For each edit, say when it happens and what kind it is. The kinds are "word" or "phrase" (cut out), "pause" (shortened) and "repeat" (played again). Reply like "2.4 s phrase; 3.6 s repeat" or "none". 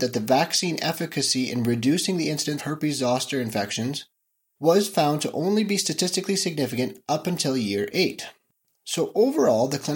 2.6 s word